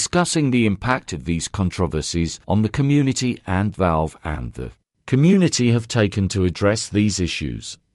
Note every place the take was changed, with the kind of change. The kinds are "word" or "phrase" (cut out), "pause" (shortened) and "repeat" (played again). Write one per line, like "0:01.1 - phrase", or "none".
0:02.4 - pause
0:03.7 - word